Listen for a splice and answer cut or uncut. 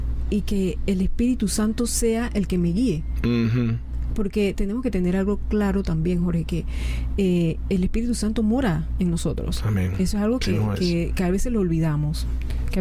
uncut